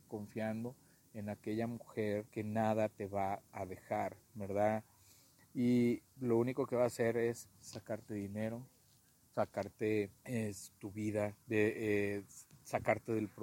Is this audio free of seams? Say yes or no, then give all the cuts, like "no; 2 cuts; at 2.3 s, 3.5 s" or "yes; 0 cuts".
no; 5 cuts; at 2.3 s, 4.2 s, 7.6 s, 10.2 s, 11.4 s